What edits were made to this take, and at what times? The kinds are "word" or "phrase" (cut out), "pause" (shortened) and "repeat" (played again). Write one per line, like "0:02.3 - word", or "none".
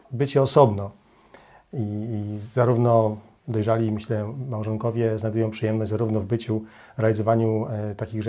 none